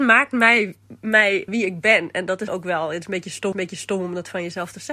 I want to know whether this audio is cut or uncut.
cut